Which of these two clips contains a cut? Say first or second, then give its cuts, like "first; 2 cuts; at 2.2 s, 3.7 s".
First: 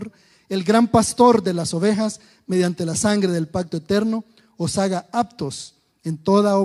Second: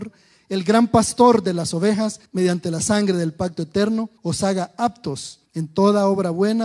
second; 3 cuts; at 2.3 s, 4.2 s, 5.5 s